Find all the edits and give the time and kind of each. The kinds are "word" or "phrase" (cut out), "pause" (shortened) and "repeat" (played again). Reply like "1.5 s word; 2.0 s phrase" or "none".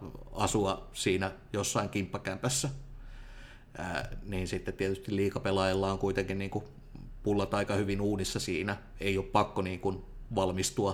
none